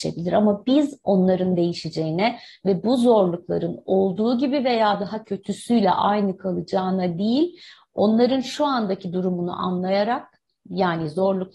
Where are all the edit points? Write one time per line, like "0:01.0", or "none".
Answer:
none